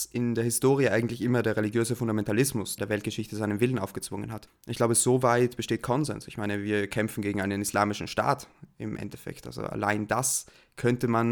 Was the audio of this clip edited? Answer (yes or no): yes